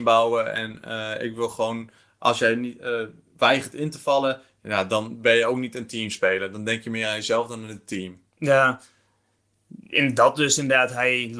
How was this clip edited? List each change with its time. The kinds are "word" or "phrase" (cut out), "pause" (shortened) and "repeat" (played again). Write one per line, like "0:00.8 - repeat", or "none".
none